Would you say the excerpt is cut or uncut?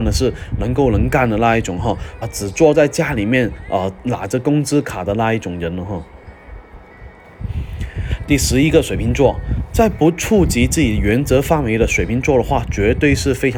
cut